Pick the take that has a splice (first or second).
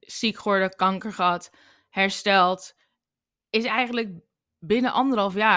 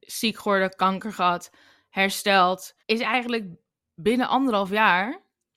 second